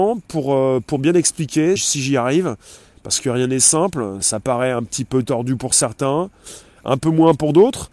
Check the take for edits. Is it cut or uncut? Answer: cut